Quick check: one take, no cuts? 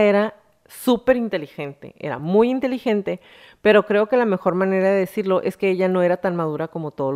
yes; 0 cuts

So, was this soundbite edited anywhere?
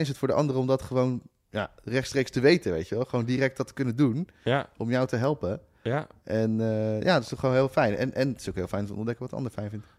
no; 0 cuts

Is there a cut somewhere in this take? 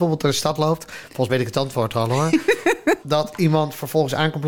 yes; 2 cuts; at 1.3 s, 3.0 s

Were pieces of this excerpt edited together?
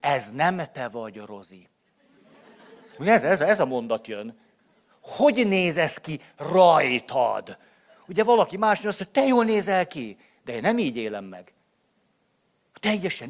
no; 0 cuts

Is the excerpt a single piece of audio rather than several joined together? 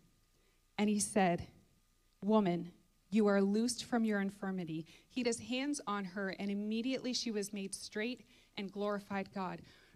no; 1 cut; at 5.2 s

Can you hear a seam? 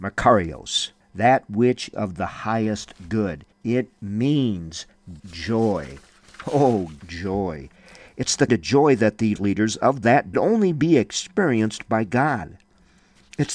yes; 8 cuts; at 1.0 s, 1.9 s, 3.5 s, 5.2 s, 7.0 s, 8.5 s, 9.4 s, 10.3 s

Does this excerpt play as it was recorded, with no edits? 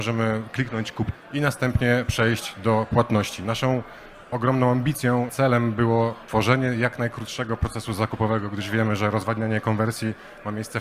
no; 1 cut; at 1.1 s

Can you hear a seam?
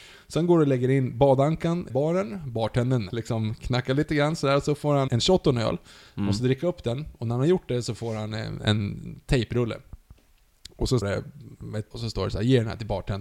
yes; 6 cuts; at 1.9 s, 3.1 s, 5.1 s, 8.3 s, 11.0 s, 11.9 s

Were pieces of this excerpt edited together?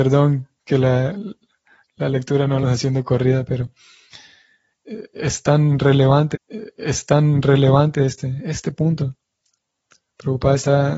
yes; 2 cuts; at 2.6 s, 6.3 s

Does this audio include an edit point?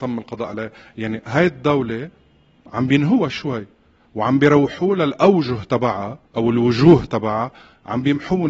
yes; 2 cuts; at 3.3 s, 6.2 s

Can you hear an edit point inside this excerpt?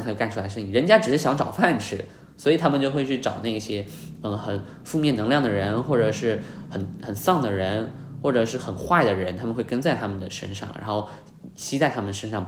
no; 0 cuts

